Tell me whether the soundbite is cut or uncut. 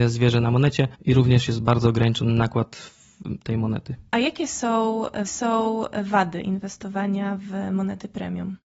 cut